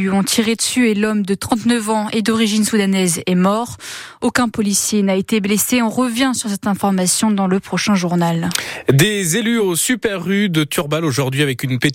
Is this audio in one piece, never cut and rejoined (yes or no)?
yes